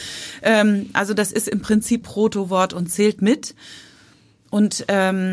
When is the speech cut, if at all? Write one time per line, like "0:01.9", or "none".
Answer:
0:02.0